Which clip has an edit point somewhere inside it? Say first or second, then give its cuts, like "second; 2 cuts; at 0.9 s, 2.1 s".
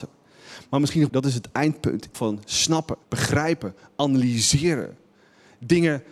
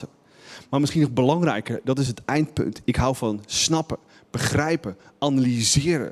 first; 3 cuts; at 1.1 s, 2.1 s, 3.0 s